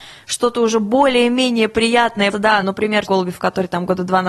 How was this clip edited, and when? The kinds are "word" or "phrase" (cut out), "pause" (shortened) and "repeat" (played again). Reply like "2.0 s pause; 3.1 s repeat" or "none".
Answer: 2.3 s word; 2.6 s word; 3.1 s word